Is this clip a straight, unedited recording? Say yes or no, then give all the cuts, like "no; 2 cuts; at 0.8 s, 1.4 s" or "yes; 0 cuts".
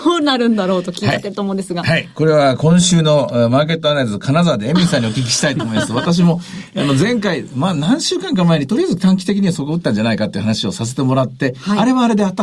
yes; 0 cuts